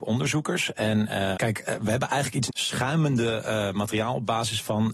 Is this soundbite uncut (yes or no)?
no